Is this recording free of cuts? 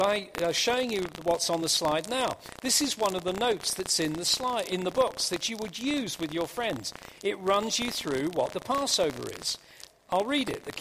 yes; 0 cuts

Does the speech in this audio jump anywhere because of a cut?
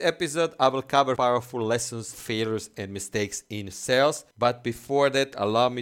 yes; 3 cuts; at 1.2 s, 2.1 s, 4.3 s

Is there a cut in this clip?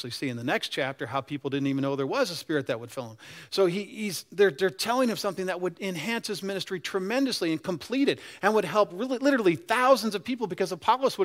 no; 0 cuts

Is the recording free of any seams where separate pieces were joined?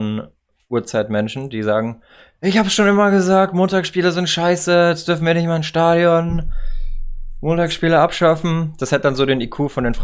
yes; 0 cuts

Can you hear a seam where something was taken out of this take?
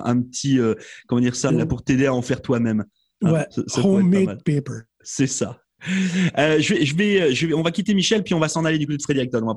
yes; 2 cuts; at 1.5 s, 4.4 s

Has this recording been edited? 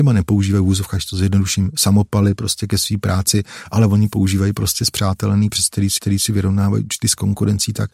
yes; 2 cuts; at 5.5 s, 6.0 s

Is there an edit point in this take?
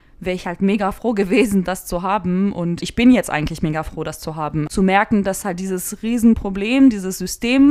no; 0 cuts

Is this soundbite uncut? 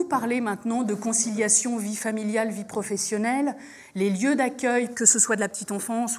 yes; 0 cuts

